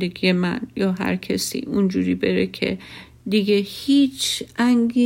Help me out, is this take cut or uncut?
uncut